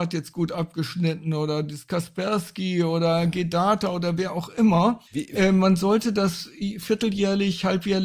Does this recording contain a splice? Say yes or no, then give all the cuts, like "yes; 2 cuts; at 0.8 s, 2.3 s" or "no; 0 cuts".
yes; 1 cut; at 5.1 s